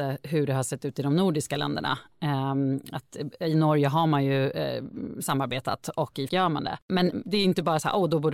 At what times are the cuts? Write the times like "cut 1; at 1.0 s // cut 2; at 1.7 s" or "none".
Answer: cut 1; at 6.3 s

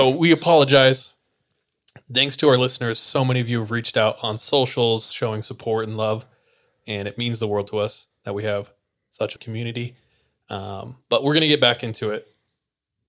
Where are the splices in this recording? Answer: cut 1; at 9.4 s

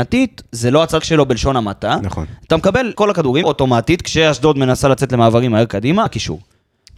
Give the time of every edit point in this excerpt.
cut 1; at 1.0 s // cut 2; at 2.9 s // cut 3; at 3.4 s // cut 4; at 6.1 s

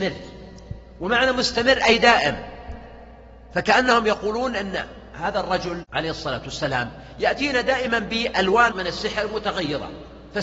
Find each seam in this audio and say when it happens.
cut 1; at 8.7 s

